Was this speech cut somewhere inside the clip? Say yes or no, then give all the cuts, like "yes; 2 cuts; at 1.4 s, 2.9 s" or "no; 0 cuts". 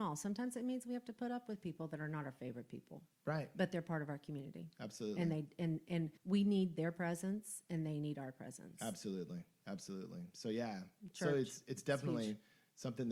yes; 2 cuts; at 3.1 s, 6.2 s